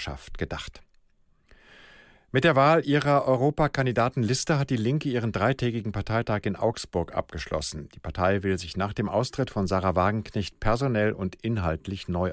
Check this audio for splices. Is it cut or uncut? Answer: uncut